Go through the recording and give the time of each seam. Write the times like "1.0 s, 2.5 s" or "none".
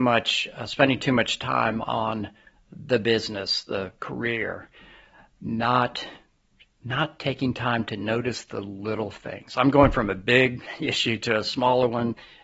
none